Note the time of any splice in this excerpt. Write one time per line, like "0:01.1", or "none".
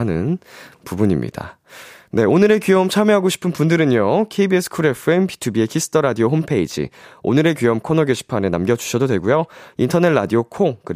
none